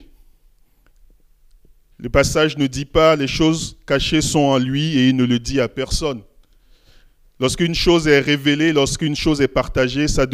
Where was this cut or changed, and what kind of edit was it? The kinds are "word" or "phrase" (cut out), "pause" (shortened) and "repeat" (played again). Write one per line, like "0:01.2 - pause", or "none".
none